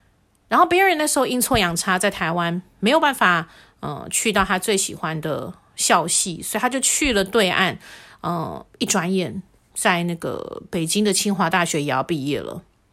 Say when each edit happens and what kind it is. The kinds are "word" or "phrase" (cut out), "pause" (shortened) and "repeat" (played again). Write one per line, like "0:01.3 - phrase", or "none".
none